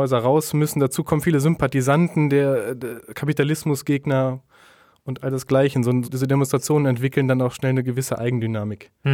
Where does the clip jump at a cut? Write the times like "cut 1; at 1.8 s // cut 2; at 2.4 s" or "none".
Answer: cut 1; at 6.0 s